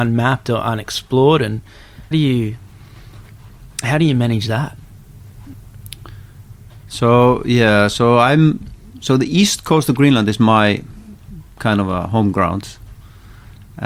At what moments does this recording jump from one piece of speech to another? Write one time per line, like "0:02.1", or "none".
0:02.1